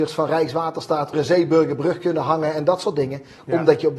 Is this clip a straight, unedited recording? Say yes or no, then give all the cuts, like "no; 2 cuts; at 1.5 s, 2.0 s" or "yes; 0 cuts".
no; 1 cut; at 1.1 s